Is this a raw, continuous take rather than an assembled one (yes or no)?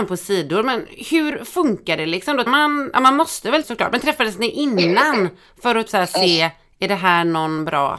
no